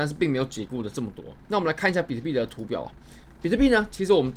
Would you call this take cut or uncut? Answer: cut